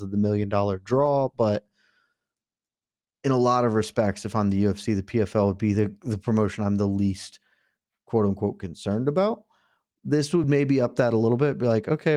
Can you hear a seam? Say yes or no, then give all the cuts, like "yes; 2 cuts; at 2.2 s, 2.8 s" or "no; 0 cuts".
no; 0 cuts